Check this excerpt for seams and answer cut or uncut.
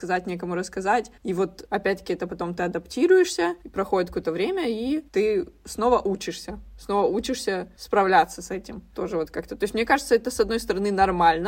uncut